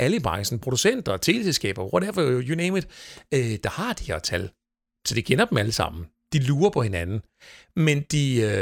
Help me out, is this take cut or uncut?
uncut